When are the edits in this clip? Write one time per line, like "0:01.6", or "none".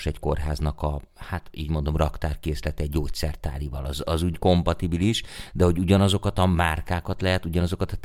0:04.3